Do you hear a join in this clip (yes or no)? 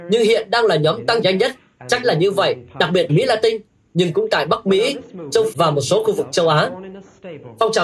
yes